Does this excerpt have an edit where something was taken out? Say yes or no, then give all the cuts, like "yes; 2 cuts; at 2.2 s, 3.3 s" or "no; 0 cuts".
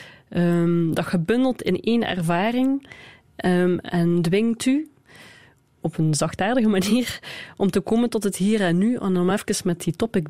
no; 0 cuts